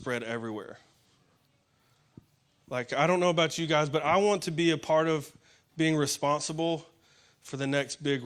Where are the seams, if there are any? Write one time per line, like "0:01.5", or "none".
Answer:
none